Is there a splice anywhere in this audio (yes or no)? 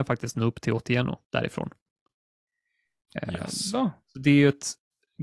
yes